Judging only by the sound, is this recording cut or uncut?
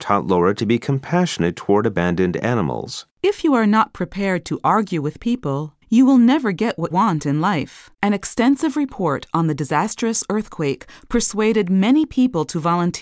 cut